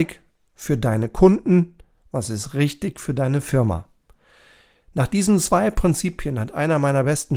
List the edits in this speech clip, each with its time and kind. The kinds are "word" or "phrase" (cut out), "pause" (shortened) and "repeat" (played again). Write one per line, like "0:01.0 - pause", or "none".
none